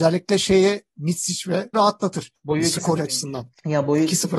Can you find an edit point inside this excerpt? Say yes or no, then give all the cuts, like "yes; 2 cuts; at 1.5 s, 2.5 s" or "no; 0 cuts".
yes; 2 cuts; at 1.7 s, 3.0 s